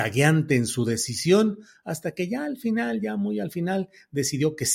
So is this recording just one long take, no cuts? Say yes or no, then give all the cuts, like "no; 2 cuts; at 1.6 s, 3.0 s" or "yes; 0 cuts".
yes; 0 cuts